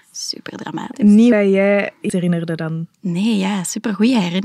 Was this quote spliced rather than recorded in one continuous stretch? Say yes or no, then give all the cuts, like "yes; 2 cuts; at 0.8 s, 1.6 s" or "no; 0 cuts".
yes; 2 cuts; at 1.3 s, 2.1 s